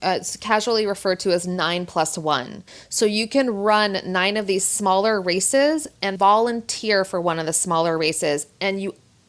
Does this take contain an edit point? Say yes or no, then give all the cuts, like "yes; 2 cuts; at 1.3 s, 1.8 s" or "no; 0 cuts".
yes; 1 cut; at 6.2 s